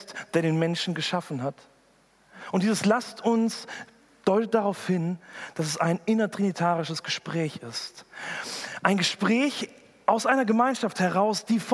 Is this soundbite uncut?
yes; 0 cuts

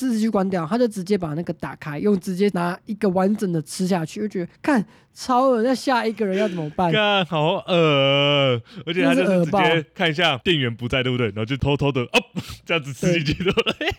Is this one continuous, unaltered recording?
yes; 0 cuts

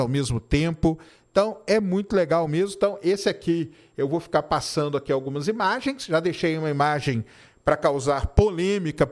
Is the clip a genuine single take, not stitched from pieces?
yes; 0 cuts

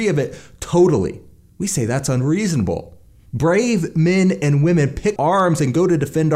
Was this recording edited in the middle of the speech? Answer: yes; 1 cut; at 5.2 s

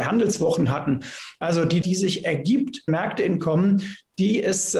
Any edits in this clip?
yes; 3 cuts; at 1.8 s, 2.9 s, 3.4 s

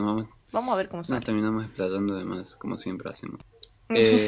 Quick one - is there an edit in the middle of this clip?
no; 0 cuts

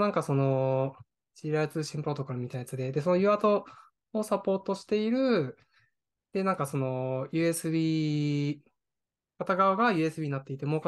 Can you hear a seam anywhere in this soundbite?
no; 0 cuts

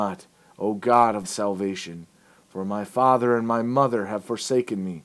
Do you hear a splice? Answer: yes; 1 cut; at 1.2 s

